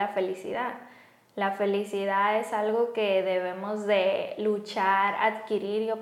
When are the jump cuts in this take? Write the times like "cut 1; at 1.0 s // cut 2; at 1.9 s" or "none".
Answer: none